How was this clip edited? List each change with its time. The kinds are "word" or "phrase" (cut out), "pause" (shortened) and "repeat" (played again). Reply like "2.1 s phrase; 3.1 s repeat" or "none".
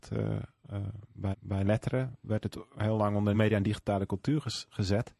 1.3 s repeat; 3.3 s word